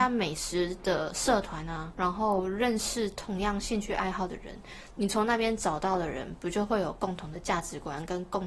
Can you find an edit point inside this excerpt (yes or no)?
yes